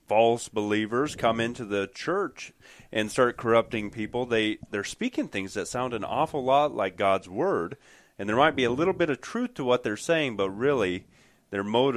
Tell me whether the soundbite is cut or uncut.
uncut